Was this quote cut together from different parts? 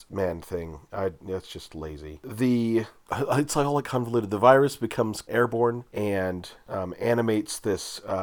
yes; 1 cut; at 5.3 s

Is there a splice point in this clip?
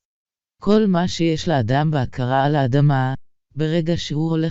no; 0 cuts

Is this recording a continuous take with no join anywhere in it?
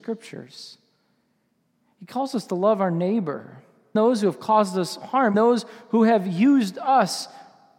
no; 2 cuts; at 4.0 s, 5.3 s

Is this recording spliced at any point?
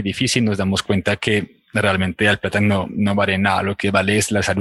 no; 0 cuts

